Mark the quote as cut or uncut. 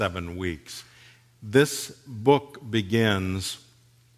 uncut